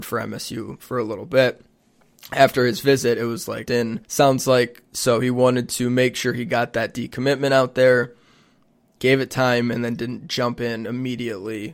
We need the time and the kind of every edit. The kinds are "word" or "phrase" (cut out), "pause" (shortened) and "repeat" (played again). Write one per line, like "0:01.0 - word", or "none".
0:03.7 - word
0:04.0 - pause